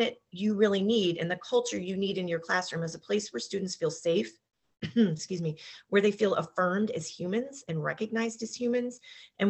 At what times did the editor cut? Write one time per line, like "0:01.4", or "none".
none